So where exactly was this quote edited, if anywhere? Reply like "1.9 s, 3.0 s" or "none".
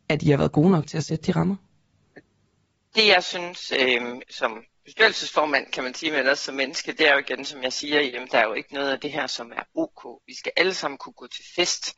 none